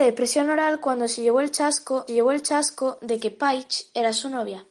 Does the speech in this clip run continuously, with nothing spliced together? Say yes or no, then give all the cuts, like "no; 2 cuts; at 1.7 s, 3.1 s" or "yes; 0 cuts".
no; 1 cut; at 2.1 s